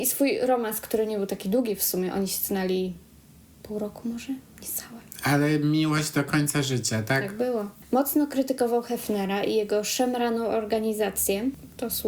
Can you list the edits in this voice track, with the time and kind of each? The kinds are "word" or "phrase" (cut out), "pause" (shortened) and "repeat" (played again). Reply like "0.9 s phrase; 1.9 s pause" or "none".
none